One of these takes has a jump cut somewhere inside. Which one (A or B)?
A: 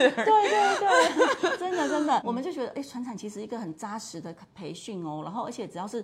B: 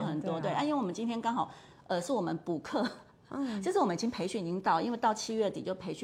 A